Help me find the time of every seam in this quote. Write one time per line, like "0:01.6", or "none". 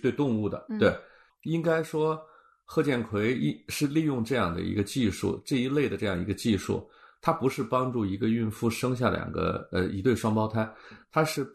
none